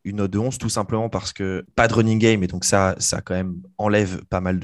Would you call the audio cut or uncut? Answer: uncut